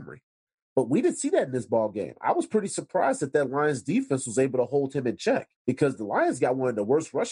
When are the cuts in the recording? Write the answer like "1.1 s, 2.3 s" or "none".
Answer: 5.5 s